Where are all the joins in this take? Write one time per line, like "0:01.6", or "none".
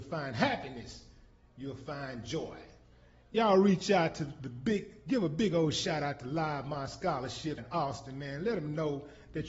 0:07.6

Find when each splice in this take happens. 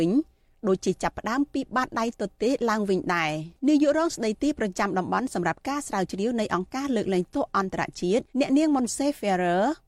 0:03.6
0:08.3

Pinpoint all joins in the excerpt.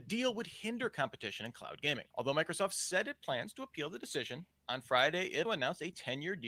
0:02.1
0:05.4

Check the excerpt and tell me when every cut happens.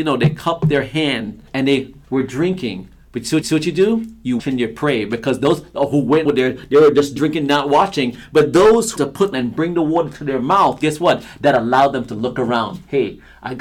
0:01.5
0:02.0
0:03.4
0:04.4
0:06.2
0:07.2
0:09.0
0:09.3

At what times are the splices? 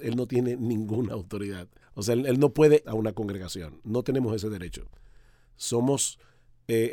0:01.8
0:02.8

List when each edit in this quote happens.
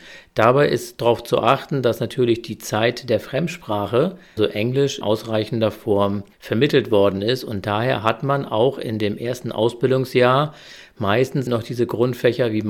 0:04.4
0:05.0
0:06.3
0:11.5

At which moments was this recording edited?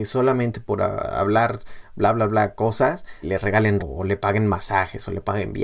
0:03.2
0:03.8

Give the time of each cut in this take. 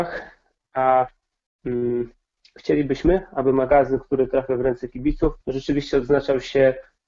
0:05.4

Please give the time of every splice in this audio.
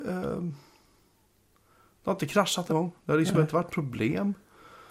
0:02.7
0:03.7

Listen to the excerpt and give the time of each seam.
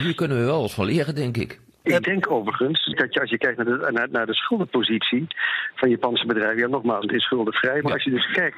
0:07.0

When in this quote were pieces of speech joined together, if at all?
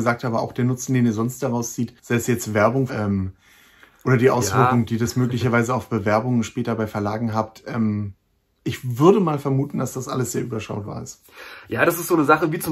0:02.0
0:02.9

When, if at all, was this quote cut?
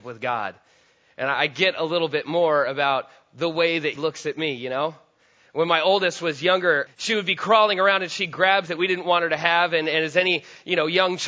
0:04.0
0:06.9
0:08.7

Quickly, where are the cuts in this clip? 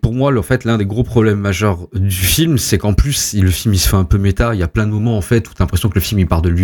none

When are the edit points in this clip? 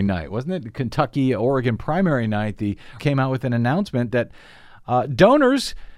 0:03.0

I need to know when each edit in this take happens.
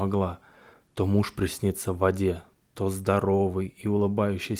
none

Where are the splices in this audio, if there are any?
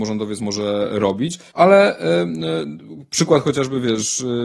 0:01.5

